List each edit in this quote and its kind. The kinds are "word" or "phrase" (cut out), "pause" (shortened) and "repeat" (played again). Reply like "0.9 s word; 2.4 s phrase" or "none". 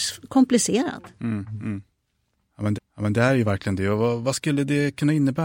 2.7 s repeat